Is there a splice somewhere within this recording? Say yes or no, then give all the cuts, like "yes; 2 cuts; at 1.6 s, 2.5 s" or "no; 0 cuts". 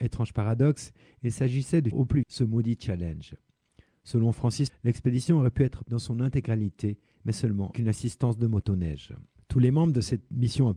yes; 5 cuts; at 1.9 s, 2.2 s, 4.7 s, 5.8 s, 7.7 s